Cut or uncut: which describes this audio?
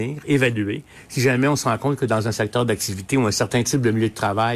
uncut